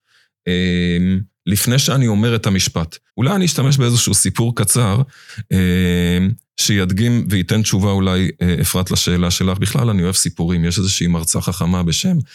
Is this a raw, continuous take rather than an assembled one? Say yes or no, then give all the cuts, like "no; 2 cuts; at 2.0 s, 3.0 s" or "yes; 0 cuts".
no; 2 cuts; at 3.1 s, 6.4 s